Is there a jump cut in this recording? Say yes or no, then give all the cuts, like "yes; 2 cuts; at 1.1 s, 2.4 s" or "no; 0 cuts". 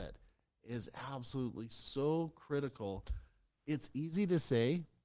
no; 0 cuts